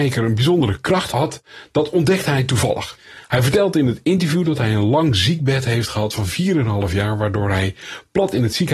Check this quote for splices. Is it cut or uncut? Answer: uncut